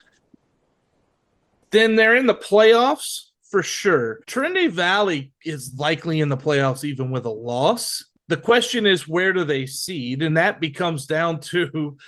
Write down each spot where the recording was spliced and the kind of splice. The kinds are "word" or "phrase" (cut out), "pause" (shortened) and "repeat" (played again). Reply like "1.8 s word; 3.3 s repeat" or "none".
4.2 s pause; 8.1 s pause; 10.3 s word